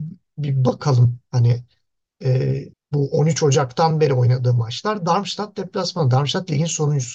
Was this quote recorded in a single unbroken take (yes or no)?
no